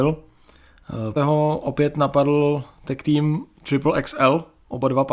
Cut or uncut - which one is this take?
cut